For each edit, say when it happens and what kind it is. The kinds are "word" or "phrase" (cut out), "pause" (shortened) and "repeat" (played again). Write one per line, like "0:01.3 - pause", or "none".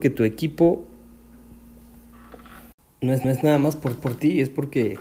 0:02.7 - pause
0:03.2 - repeat
0:04.0 - repeat